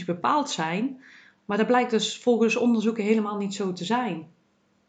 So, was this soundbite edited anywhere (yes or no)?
no